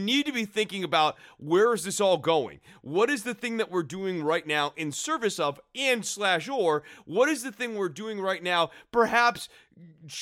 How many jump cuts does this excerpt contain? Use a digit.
0